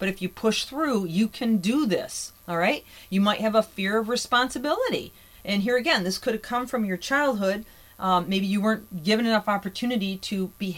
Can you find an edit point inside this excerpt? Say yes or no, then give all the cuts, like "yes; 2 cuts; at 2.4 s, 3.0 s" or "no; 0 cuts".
no; 0 cuts